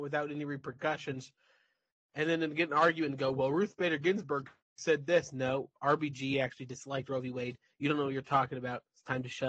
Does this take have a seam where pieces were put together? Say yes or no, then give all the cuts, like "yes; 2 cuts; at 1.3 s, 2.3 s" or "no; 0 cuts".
no; 0 cuts